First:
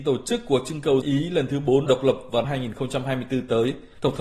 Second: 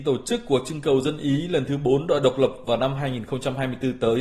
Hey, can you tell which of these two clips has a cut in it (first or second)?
first